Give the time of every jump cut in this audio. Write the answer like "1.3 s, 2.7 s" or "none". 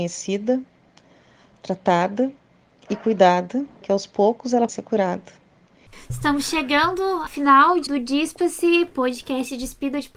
3.8 s, 4.7 s, 7.3 s, 7.9 s

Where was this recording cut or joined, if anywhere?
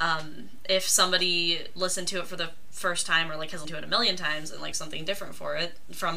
3.6 s, 4.7 s

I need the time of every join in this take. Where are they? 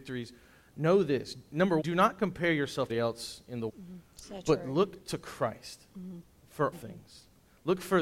1.8 s, 2.9 s, 3.7 s, 6.7 s

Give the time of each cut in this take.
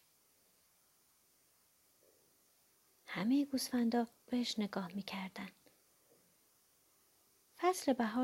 4.3 s

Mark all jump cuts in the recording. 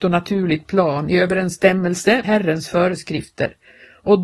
2.2 s

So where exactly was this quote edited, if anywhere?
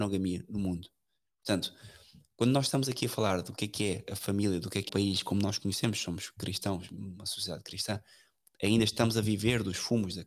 4.9 s

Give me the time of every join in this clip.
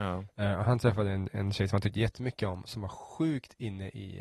none

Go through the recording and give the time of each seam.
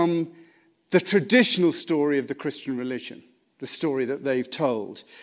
none

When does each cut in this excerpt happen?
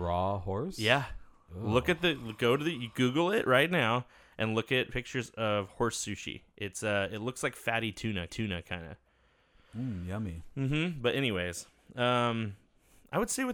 8.3 s

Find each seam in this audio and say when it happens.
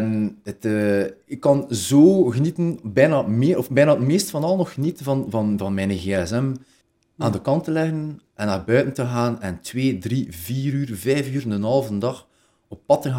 6.8 s, 8.3 s

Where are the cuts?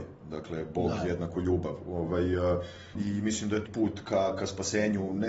2.9 s, 3.7 s

